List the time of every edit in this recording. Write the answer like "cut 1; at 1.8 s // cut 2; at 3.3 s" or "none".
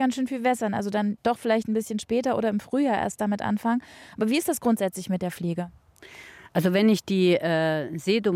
none